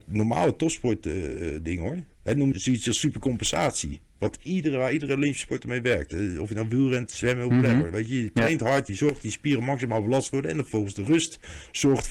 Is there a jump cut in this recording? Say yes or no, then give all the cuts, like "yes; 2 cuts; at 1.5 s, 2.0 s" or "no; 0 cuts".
yes; 3 cuts; at 2.1 s, 2.5 s, 8.9 s